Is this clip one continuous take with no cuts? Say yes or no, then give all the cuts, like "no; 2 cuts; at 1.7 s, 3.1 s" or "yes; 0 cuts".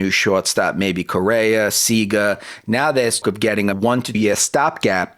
no; 3 cuts; at 3.2 s, 3.7 s, 4.1 s